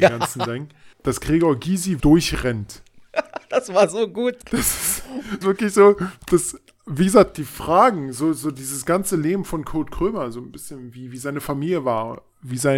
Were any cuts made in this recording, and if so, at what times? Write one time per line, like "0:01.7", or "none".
0:00.9
0:02.0
0:04.4
0:05.4